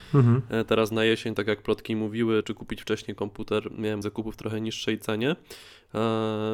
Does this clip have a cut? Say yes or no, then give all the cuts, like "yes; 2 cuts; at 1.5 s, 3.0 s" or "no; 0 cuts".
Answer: yes; 2 cuts; at 2.4 s, 4.0 s